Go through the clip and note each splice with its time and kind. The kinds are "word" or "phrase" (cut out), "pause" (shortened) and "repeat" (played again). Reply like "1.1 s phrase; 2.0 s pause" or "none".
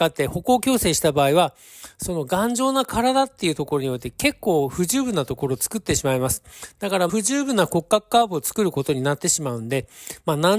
7.1 s word